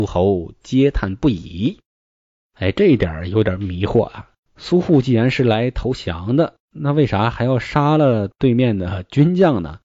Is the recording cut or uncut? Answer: cut